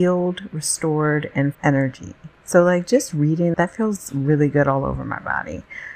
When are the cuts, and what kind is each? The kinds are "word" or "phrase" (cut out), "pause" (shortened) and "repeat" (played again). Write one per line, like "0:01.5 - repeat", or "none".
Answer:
0:01.5 - phrase
0:02.4 - pause
0:03.5 - word